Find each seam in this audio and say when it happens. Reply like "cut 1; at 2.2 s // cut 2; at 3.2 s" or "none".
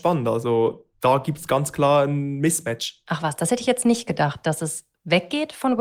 cut 1; at 0.9 s